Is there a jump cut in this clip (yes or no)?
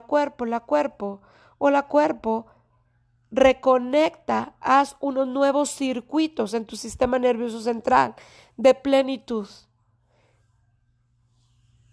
no